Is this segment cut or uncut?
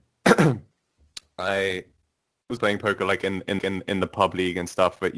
cut